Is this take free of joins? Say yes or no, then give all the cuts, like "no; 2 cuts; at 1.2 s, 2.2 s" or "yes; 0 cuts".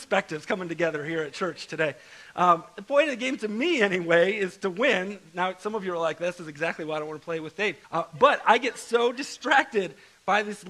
no; 1 cut; at 7.8 s